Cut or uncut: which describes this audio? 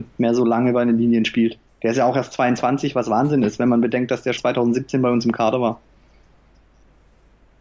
cut